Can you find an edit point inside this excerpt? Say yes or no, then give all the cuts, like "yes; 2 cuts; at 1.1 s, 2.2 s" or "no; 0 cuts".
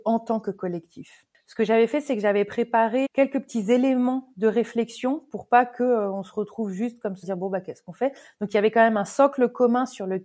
yes; 2 cuts; at 3.0 s, 7.2 s